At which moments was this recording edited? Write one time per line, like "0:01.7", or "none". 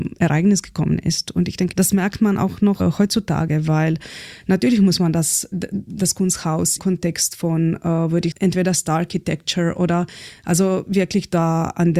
0:01.7
0:02.8
0:05.5
0:06.8
0:08.3